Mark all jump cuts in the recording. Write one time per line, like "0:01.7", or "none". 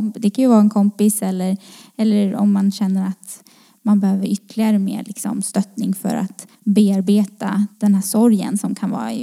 0:06.5